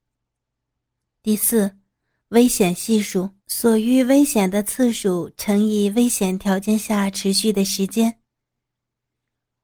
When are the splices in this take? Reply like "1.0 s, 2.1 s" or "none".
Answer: 3.4 s